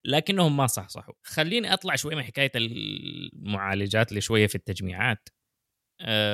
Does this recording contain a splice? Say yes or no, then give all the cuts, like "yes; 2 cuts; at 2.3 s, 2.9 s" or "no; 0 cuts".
no; 0 cuts